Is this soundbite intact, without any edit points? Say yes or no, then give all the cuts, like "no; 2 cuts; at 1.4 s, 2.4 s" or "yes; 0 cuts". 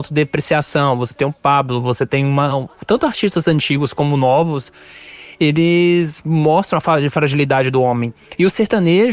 yes; 0 cuts